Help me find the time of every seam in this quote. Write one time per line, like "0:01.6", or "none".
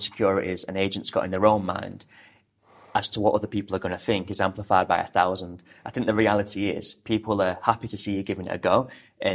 none